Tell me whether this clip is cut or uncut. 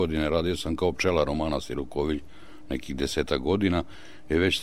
uncut